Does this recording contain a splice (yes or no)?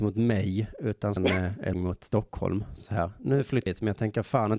yes